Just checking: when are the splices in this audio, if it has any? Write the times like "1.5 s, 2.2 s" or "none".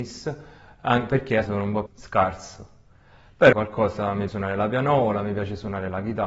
1.4 s, 1.9 s, 3.5 s, 4.3 s